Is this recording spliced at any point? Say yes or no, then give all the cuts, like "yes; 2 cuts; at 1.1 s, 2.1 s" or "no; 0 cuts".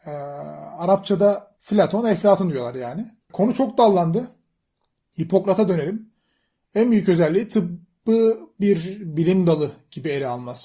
yes; 2 cuts; at 1.6 s, 3.2 s